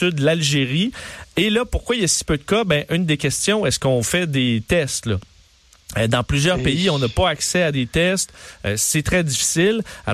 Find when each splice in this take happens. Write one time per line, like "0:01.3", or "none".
none